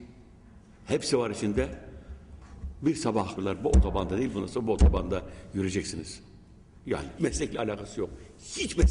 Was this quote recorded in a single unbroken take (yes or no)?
no